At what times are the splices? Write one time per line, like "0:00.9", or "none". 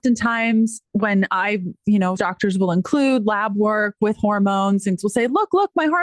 0:02.2
0:05.0

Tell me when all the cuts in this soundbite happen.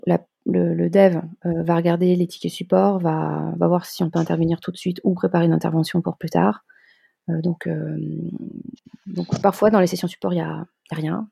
none

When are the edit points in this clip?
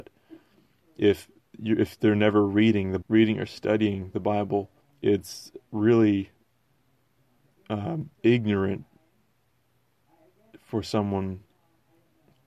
0:03.0
0:04.8
0:08.1

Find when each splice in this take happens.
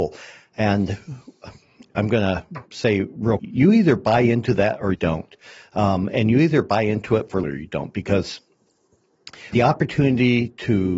0:01.9
0:02.7
0:03.4
0:04.9
0:07.4
0:09.5

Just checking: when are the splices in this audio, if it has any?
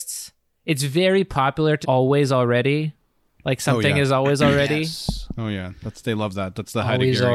0:01.8

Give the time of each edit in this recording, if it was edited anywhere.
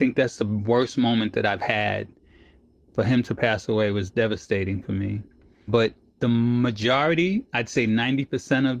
none

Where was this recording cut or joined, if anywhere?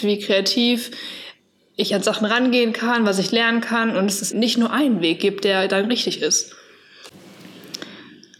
0:04.3

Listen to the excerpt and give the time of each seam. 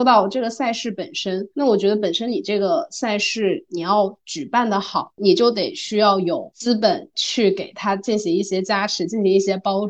0:01.5

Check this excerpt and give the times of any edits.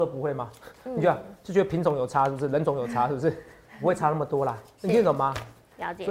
none

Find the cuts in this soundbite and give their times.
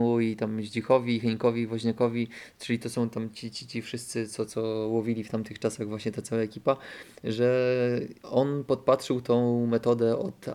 0:03.5

